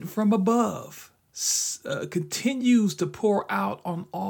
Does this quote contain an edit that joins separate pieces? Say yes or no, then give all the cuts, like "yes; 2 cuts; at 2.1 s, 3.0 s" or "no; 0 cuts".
no; 0 cuts